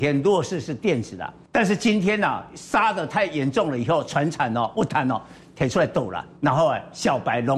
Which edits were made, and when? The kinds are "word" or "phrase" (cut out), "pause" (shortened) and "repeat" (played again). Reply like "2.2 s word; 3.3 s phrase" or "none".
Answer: 1.4 s pause; 6.4 s pause